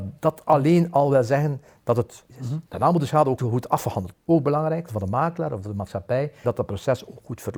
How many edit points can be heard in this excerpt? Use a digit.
6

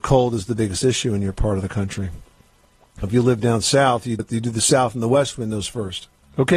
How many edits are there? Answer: 2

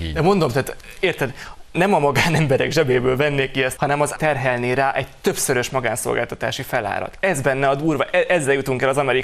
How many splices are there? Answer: 3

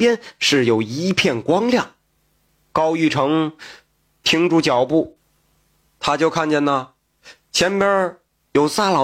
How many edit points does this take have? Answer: 0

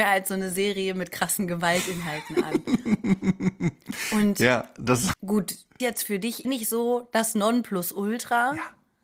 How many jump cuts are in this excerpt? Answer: 3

